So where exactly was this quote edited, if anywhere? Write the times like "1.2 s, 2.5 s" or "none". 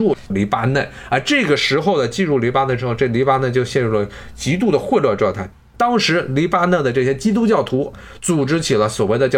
5.6 s